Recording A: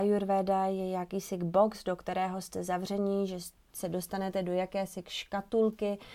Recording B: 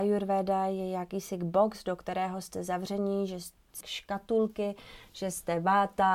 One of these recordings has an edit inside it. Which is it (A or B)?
B